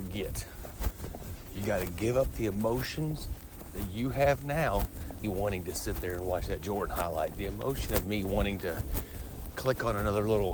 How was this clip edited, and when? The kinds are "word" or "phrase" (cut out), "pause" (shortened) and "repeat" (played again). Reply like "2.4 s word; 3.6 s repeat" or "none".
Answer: 5.2 s phrase